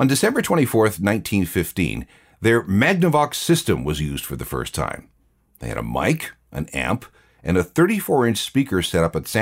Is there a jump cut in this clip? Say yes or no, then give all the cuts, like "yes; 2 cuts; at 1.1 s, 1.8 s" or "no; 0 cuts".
no; 0 cuts